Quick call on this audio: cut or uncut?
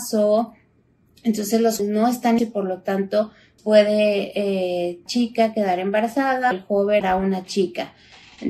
cut